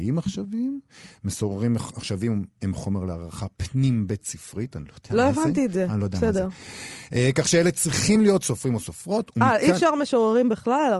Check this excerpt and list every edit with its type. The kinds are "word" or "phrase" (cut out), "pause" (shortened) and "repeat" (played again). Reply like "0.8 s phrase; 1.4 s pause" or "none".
none